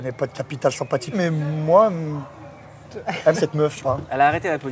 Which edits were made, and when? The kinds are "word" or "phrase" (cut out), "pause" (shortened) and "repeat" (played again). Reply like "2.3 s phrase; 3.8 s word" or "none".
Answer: 1.1 s word; 3.3 s word; 3.8 s phrase